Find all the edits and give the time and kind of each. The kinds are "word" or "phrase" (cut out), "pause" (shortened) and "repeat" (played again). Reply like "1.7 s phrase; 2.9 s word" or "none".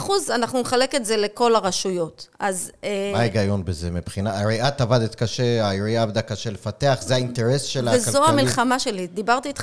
2.3 s pause